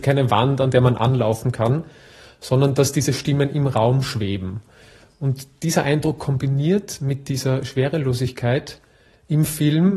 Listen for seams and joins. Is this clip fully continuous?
yes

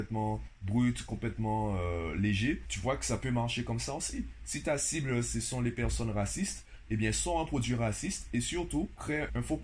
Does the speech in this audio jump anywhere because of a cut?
no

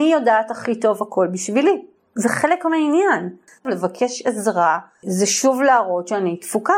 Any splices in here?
no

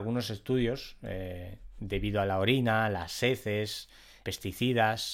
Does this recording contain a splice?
no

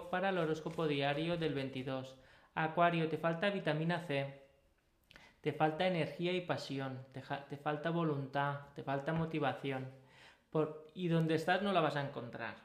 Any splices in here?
no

